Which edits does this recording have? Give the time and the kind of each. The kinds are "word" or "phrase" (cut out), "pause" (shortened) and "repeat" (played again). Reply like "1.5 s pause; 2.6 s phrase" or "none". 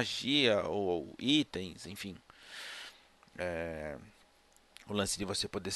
none